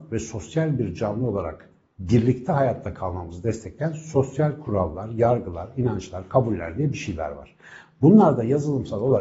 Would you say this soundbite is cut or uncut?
uncut